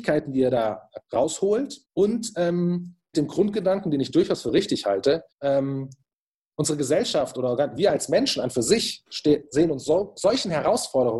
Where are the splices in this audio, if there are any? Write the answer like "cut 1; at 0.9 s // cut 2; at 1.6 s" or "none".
cut 1; at 1.8 s // cut 2; at 3.1 s // cut 3; at 5.3 s